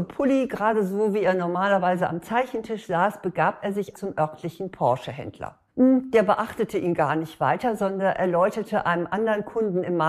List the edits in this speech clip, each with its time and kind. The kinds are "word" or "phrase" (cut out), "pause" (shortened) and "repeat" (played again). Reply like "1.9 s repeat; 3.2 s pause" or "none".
3.9 s word; 5.7 s pause